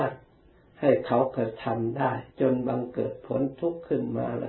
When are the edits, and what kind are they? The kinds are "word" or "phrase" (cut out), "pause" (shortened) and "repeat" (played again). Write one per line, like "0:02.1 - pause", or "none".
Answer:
0:02.3 - pause